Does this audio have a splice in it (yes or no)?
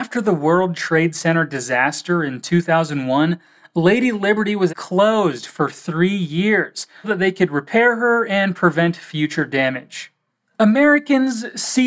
yes